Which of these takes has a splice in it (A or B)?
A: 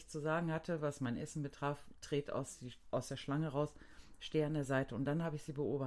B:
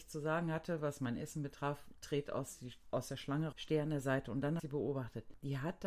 B